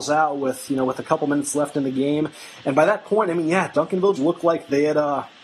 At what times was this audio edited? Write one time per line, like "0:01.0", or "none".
0:04.2